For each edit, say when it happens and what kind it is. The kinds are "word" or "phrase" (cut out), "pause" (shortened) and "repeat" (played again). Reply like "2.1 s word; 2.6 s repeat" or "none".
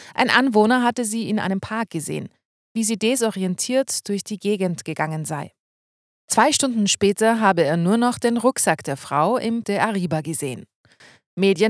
9.6 s word